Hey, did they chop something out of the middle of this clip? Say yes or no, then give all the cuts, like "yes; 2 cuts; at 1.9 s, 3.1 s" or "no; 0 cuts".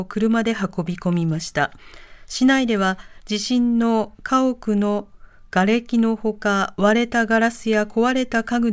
no; 0 cuts